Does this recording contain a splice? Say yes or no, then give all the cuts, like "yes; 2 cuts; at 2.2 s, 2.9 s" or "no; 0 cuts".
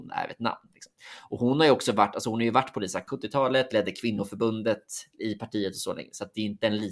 yes; 1 cut; at 3.1 s